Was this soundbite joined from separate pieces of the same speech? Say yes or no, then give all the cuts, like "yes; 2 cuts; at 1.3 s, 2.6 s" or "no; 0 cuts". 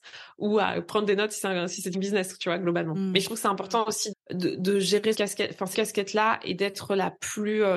yes; 4 cuts; at 1.9 s, 4.1 s, 5.1 s, 5.7 s